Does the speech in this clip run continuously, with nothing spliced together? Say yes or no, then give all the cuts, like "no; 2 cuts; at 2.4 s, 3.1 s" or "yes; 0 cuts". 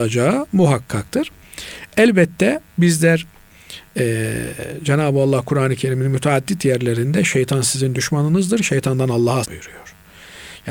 no; 2 cuts; at 2.7 s, 9.4 s